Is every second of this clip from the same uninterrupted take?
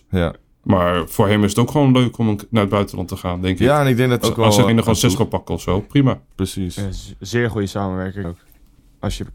no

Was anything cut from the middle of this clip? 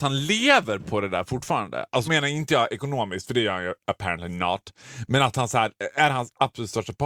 yes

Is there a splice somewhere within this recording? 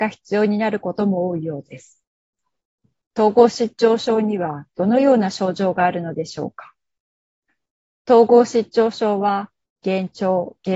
no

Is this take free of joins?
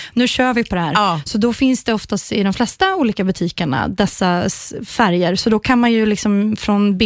yes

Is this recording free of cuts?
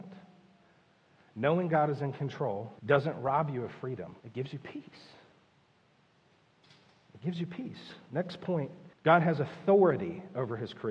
no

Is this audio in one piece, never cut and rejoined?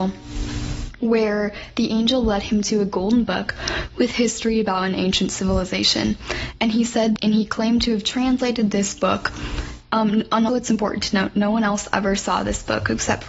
no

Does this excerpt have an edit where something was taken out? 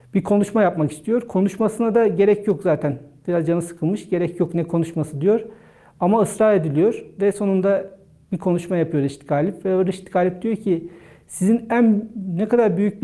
no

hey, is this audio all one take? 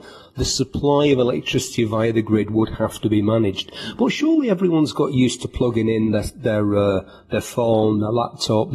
yes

